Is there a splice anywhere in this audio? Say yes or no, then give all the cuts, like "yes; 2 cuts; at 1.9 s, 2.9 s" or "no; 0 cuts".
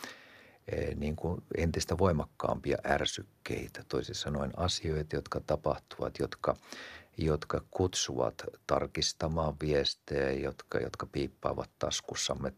no; 0 cuts